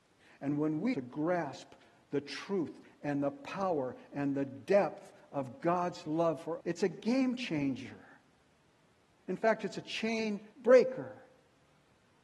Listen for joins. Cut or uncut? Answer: cut